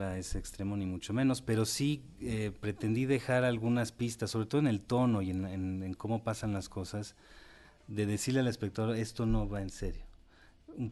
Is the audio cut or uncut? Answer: uncut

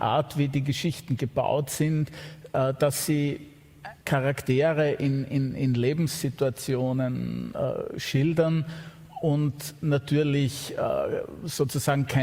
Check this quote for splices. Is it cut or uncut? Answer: cut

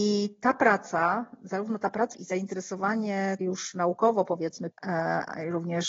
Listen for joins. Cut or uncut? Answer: cut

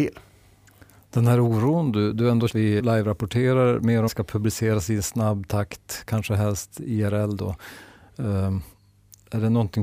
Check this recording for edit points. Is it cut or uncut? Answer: cut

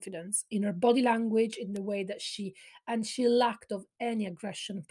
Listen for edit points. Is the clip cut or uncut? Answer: uncut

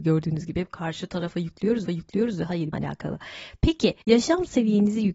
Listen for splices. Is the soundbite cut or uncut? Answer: cut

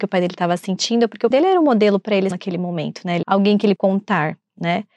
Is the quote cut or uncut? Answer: cut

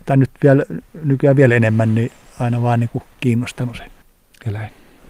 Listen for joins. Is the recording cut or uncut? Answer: uncut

